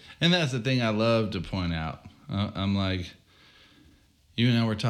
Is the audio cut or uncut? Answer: uncut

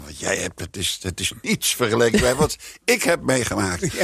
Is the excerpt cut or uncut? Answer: uncut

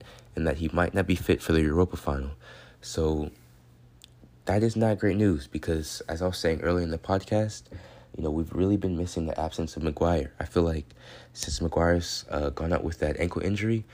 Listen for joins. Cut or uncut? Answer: uncut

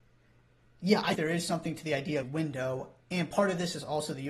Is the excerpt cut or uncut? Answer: cut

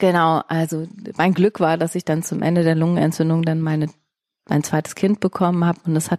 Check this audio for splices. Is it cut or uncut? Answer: uncut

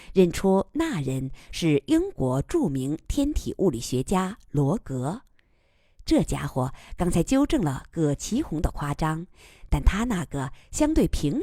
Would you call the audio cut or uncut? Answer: uncut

